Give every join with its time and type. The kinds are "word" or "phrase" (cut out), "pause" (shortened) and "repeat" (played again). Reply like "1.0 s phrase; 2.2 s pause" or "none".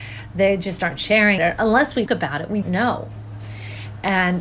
1.4 s word; 2.1 s word; 2.6 s word